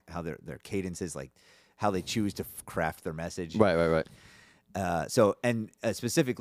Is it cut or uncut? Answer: uncut